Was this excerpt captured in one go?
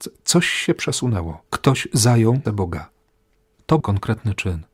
no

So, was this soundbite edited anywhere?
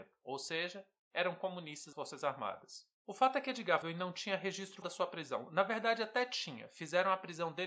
yes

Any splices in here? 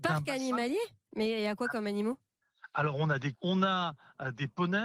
yes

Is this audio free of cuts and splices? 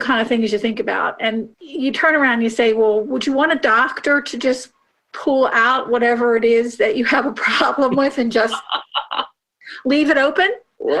no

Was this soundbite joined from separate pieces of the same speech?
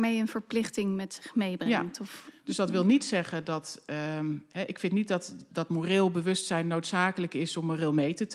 yes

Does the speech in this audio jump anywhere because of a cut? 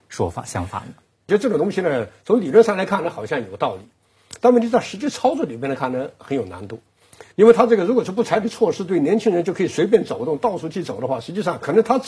yes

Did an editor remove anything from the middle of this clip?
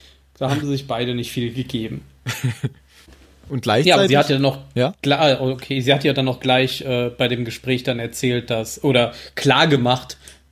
no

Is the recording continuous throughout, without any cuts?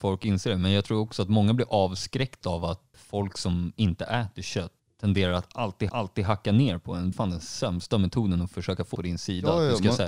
no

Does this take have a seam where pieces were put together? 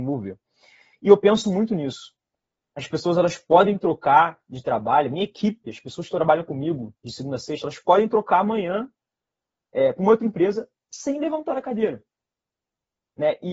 no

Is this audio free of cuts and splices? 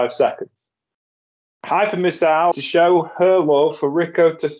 no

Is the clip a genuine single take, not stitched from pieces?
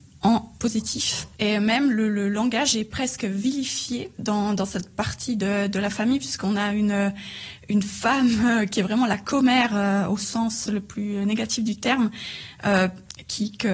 yes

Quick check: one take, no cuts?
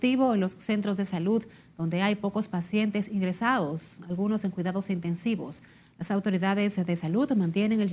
yes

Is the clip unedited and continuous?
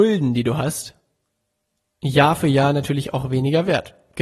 yes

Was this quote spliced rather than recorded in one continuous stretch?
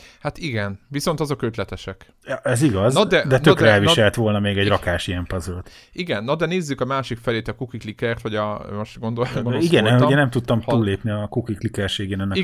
no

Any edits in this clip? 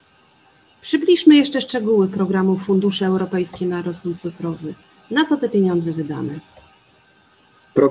no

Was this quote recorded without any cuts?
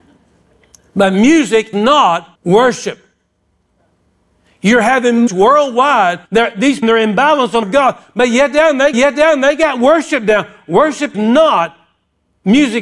no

